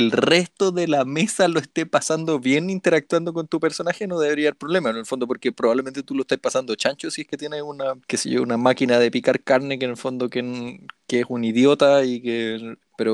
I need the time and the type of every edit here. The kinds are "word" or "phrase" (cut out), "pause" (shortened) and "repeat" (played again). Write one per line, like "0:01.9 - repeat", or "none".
none